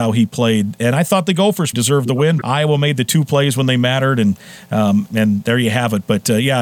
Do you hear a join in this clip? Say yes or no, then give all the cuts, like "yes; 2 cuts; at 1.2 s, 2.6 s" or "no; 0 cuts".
yes; 3 cuts; at 1.7 s, 2.4 s, 5.1 s